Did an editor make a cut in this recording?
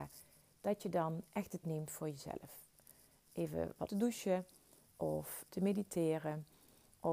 yes; 3 cuts; at 1.6 s, 3.9 s, 5.5 s

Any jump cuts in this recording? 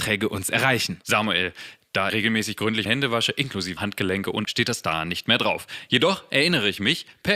yes; 4 cuts; at 2.1 s, 2.9 s, 3.8 s, 4.4 s

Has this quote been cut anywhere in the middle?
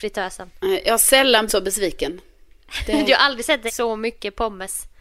yes; 2 cuts; at 1.5 s, 3.7 s

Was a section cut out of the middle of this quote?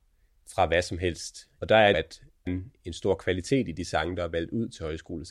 yes; 2 cuts; at 1.9 s, 2.5 s

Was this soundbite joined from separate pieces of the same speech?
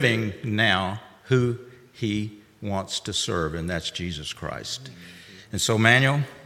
no; 0 cuts

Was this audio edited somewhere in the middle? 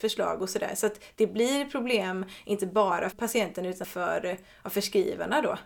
yes; 2 cuts; at 3.1 s, 3.8 s

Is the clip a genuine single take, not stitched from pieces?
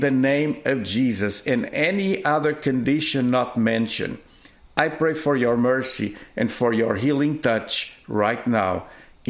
yes; 0 cuts

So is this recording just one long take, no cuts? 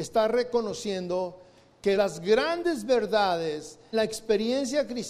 no; 2 cuts; at 1.9 s, 3.9 s

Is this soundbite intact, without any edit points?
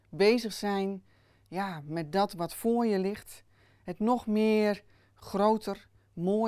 yes; 0 cuts

